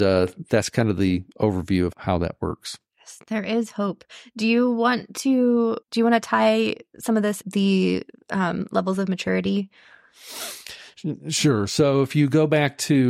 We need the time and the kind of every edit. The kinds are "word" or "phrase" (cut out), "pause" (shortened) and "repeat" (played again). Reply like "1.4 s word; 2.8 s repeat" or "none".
1.9 s word; 5.8 s pause; 7.4 s word